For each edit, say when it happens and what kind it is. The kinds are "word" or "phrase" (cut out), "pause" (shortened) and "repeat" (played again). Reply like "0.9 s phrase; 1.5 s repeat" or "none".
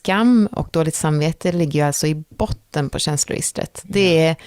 none